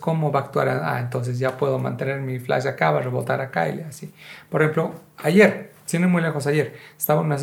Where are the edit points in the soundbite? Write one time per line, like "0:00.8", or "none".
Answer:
none